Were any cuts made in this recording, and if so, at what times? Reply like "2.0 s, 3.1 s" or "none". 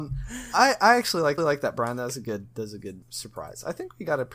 1.4 s, 3.0 s